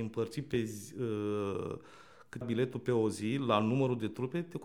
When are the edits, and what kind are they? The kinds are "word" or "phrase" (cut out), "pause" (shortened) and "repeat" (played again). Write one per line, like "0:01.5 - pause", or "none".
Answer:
0:02.4 - word